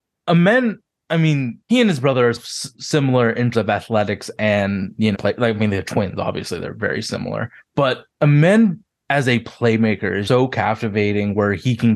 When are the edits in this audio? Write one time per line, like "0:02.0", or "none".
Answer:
0:01.6
0:02.4
0:03.5
0:05.1
0:08.1
0:10.3